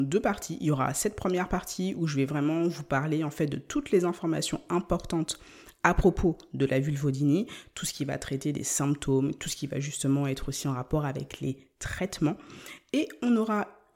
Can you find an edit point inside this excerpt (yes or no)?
no